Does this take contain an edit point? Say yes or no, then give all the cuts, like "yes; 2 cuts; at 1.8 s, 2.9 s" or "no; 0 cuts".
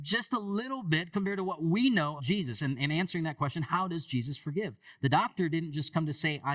yes; 1 cut; at 2.2 s